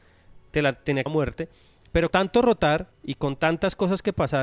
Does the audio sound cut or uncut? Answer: cut